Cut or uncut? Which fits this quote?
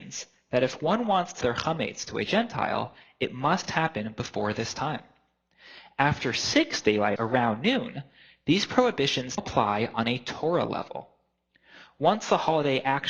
cut